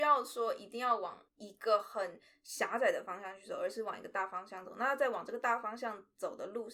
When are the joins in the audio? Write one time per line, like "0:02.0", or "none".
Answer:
0:01.3